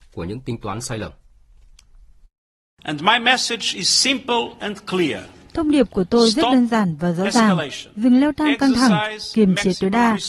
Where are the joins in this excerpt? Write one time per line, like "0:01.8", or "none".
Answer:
none